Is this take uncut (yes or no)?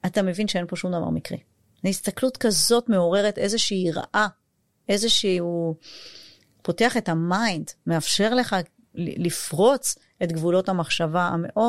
yes